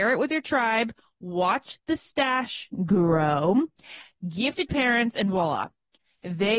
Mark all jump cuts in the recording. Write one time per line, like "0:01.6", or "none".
0:04.7